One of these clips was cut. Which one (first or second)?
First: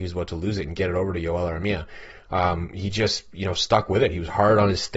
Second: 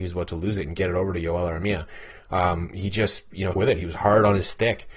second